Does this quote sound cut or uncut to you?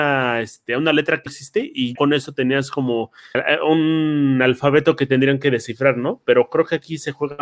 cut